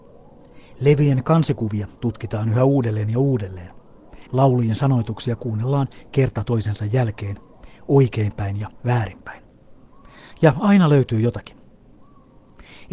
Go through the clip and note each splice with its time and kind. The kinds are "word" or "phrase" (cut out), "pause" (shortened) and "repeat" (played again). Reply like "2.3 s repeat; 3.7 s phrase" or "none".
4.3 s pause